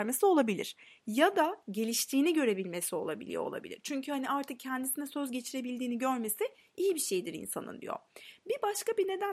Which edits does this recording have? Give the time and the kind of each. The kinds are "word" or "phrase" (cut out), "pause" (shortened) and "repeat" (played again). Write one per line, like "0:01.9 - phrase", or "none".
none